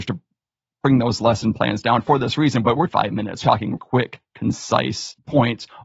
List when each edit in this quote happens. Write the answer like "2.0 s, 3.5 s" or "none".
2.9 s, 3.4 s, 3.8 s